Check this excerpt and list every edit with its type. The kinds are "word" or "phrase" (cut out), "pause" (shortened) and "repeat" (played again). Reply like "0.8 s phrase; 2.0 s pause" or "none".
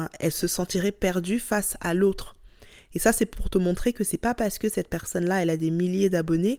none